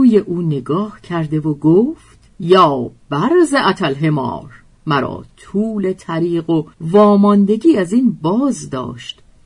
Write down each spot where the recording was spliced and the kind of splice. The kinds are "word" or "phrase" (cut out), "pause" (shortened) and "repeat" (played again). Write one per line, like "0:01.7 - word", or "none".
0:02.3 - pause
0:04.7 - pause
0:06.7 - pause

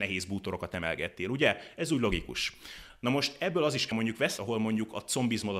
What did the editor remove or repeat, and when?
0:03.9 - phrase
0:04.4 - phrase

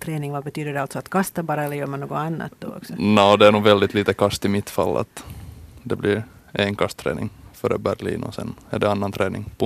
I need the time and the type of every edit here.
none

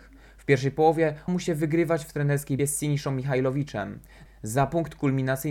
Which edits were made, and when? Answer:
0:01.3 - word
0:02.6 - word

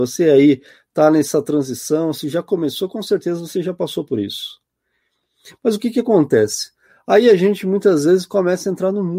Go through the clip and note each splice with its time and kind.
none

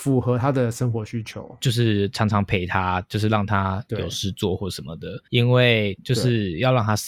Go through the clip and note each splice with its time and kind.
0:05.3 - pause

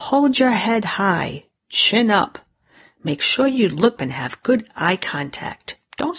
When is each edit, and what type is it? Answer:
0:04.0 - word

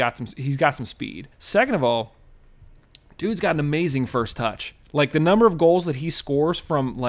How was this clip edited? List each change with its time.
0:01.3 - pause

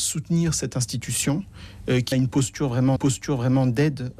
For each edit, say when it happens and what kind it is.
0:02.1 - word
0:03.0 - repeat

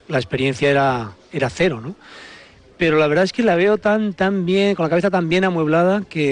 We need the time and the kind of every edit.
none

